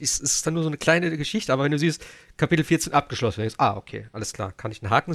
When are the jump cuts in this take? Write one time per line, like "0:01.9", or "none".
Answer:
none